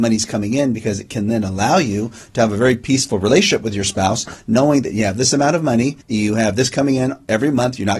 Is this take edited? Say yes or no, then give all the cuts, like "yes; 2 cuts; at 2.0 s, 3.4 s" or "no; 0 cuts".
yes; 1 cut; at 6.0 s